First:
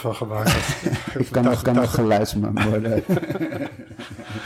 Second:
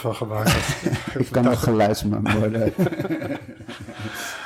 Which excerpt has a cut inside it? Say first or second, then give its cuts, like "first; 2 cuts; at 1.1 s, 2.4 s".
first; 1 cut; at 1.6 s